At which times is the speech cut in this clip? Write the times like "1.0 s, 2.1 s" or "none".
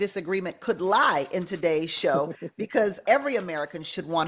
3.1 s